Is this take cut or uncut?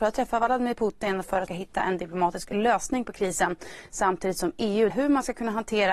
cut